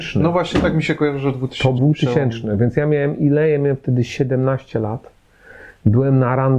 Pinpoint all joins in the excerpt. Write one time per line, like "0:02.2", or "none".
0:01.8

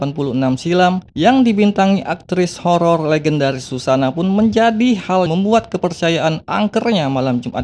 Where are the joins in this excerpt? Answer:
0:01.1
0:05.3

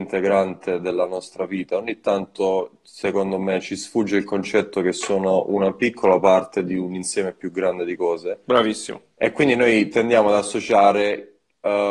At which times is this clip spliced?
none

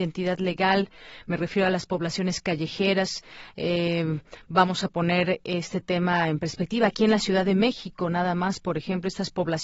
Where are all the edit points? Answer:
none

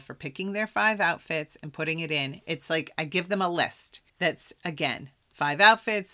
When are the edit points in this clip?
0:04.1

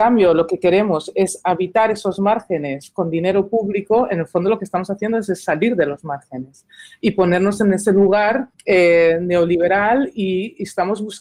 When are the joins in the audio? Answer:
0:08.5

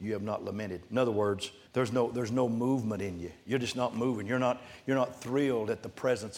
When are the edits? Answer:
0:01.7

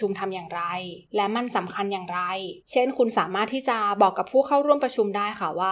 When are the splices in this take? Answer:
0:02.6

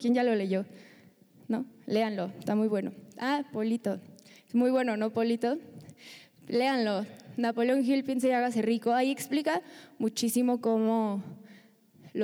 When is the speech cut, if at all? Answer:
none

